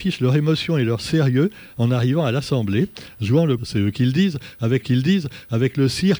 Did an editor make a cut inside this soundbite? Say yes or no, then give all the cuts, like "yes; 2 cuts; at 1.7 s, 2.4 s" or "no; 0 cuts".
yes; 2 cuts; at 3.6 s, 4.8 s